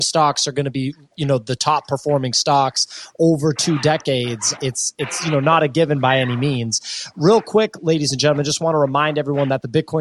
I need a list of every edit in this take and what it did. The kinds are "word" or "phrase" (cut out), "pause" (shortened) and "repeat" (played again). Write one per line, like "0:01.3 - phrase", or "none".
0:04.6 - word

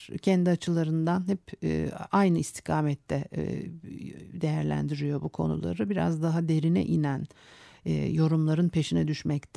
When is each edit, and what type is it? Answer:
none

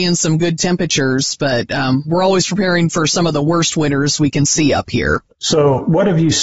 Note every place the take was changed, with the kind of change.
0:05.3 - pause

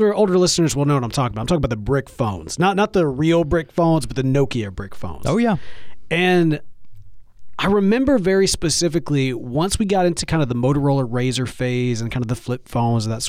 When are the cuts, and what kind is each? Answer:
none

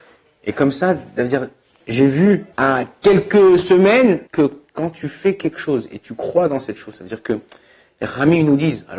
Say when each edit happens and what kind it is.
0:01.8 - word
0:02.5 - pause
0:04.3 - pause

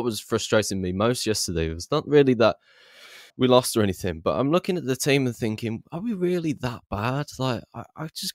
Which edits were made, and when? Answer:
0:03.3 - pause

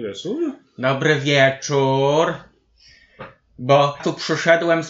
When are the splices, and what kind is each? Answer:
0:04.0 - word

